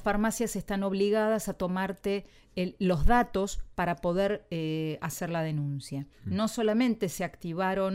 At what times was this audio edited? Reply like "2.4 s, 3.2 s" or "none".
6.1 s